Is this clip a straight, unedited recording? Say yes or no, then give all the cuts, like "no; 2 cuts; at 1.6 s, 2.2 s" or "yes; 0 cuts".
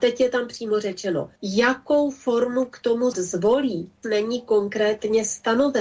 no; 3 cuts; at 1.4 s, 3.1 s, 4.0 s